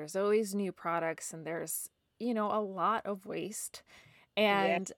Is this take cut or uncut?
uncut